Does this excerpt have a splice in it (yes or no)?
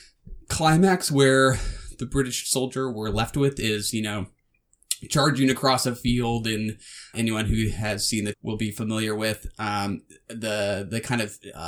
yes